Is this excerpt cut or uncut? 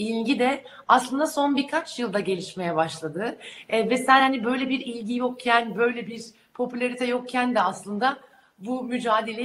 uncut